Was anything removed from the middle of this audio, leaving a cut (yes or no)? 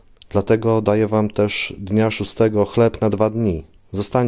no